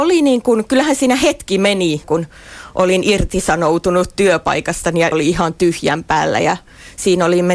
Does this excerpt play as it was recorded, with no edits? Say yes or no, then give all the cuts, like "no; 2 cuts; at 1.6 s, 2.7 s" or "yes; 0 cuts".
no; 2 cuts; at 2.0 s, 5.1 s